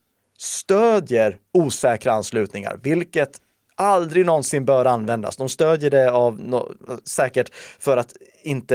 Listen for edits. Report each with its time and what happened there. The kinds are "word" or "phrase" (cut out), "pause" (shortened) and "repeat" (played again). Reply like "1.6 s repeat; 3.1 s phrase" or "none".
none